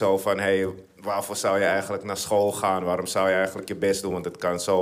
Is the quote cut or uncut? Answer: uncut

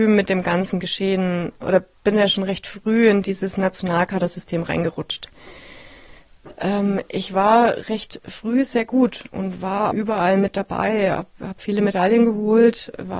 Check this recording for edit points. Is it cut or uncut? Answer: cut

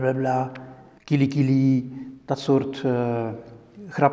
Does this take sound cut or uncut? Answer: cut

